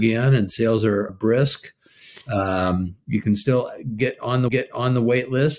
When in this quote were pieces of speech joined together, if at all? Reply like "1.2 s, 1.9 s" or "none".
1.1 s, 2.2 s, 4.5 s